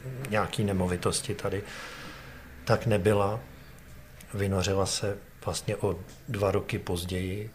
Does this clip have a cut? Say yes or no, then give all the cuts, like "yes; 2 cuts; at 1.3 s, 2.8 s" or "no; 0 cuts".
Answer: no; 0 cuts